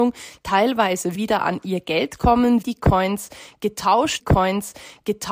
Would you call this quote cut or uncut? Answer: cut